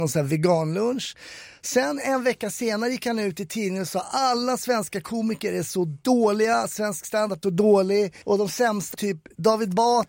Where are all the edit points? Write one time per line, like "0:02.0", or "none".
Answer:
0:07.4
0:08.2
0:08.9